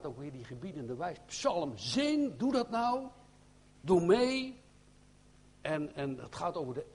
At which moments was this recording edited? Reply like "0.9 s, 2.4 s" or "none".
none